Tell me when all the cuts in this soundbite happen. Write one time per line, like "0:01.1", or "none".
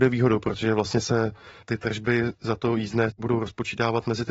none